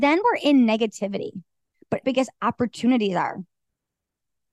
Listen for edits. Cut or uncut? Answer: cut